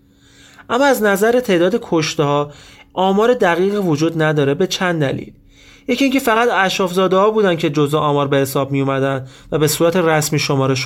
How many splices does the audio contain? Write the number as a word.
zero